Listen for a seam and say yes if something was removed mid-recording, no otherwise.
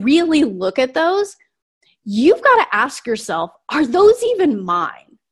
no